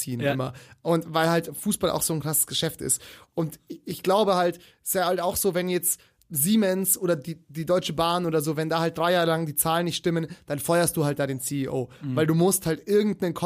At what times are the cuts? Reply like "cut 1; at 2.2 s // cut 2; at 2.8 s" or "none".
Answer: none

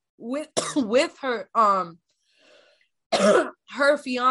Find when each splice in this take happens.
none

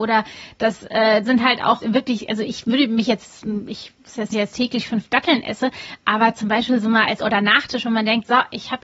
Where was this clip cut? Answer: cut 1; at 1.2 s // cut 2; at 1.8 s // cut 3; at 4.3 s // cut 4; at 7.2 s

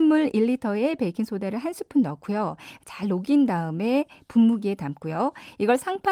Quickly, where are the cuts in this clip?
none

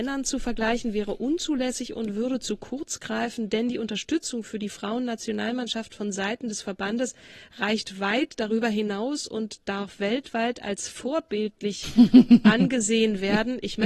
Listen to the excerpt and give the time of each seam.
none

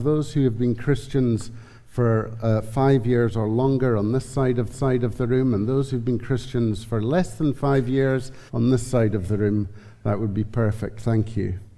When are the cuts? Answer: cut 1; at 4.7 s // cut 2; at 8.5 s

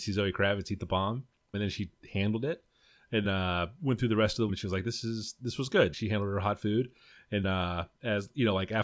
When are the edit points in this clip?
cut 1; at 1.5 s // cut 2; at 3.2 s // cut 3; at 4.5 s // cut 4; at 5.9 s // cut 5; at 7.4 s

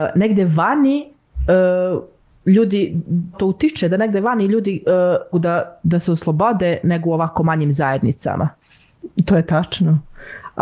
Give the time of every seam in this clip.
cut 1; at 3.3 s // cut 2; at 5.3 s // cut 3; at 6.8 s

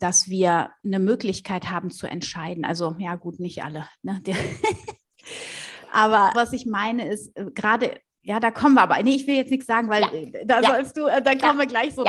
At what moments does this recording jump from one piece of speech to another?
cut 1; at 6.3 s

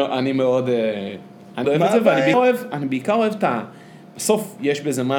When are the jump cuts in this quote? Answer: cut 1; at 1.6 s // cut 2; at 2.3 s

